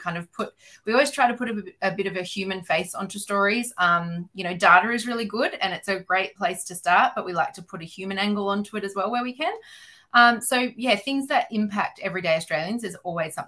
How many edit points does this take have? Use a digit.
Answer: 0